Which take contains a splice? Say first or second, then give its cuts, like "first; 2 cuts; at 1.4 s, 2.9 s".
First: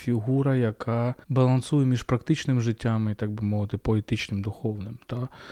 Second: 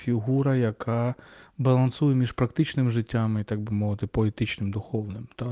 first; 1 cut; at 1.2 s